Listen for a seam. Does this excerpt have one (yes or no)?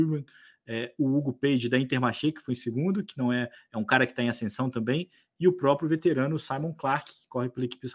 no